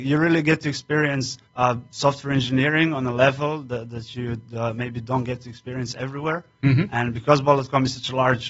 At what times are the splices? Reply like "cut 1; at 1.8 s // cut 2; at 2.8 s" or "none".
cut 1; at 1.5 s